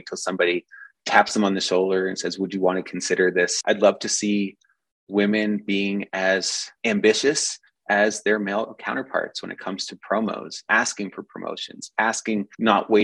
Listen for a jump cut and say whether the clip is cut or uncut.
uncut